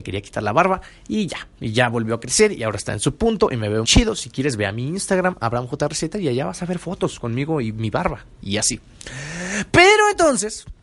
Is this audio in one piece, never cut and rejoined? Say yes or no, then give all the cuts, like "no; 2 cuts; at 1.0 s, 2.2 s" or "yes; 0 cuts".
no; 1 cut; at 3.8 s